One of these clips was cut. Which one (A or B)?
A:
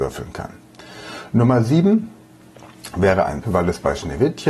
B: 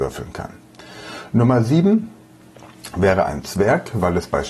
A